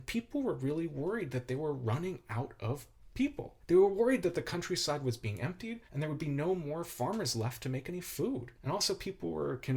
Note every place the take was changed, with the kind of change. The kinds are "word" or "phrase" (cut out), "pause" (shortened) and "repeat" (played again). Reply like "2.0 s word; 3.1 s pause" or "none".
3.6 s pause; 5.9 s pause; 8.6 s pause